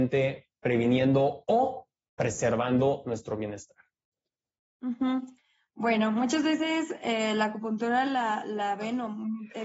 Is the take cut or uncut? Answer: uncut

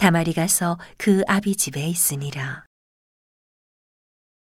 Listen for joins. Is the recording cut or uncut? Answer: uncut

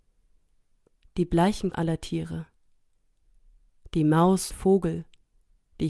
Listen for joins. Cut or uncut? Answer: cut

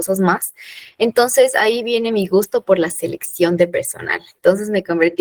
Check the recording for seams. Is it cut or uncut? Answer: uncut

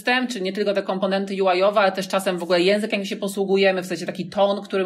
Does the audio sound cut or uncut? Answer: uncut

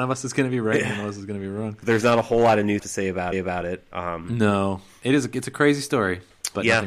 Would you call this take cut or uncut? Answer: cut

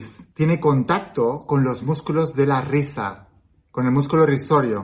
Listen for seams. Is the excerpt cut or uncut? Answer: uncut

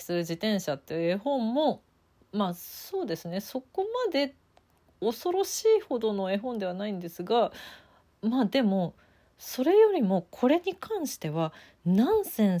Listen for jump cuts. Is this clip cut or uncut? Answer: uncut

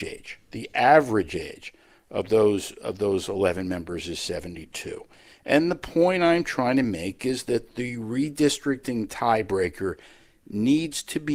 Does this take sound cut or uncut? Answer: uncut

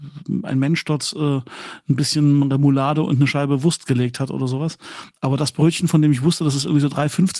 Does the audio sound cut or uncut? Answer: uncut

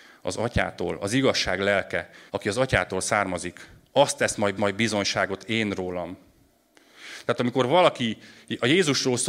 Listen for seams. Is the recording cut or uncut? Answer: cut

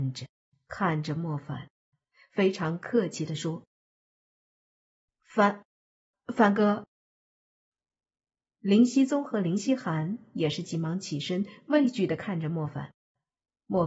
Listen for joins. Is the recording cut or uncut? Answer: uncut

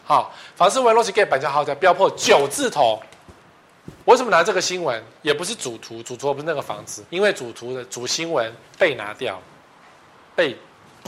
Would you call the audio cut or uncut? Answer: cut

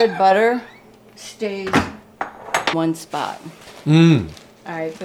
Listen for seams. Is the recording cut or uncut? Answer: cut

